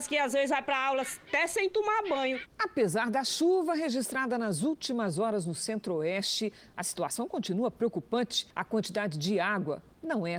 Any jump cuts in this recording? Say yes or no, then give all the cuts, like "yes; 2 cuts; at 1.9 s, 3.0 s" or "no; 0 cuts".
yes; 1 cut; at 8.5 s